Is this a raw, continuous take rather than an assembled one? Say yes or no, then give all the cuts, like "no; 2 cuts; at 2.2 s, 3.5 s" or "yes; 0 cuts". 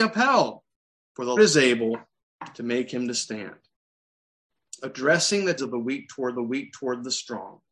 no; 3 cuts; at 1.4 s, 5.6 s, 6.4 s